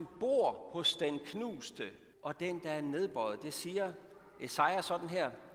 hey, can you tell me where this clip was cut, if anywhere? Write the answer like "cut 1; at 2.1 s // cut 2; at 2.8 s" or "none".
cut 1; at 2.1 s